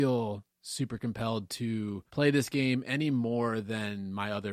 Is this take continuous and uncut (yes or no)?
no